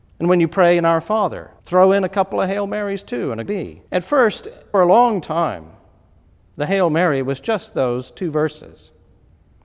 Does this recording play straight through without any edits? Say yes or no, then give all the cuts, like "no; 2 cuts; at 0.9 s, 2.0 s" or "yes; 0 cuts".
no; 4 cuts; at 1.6 s, 3.5 s, 3.9 s, 4.7 s